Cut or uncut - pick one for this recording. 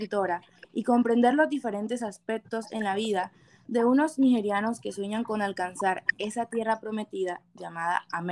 uncut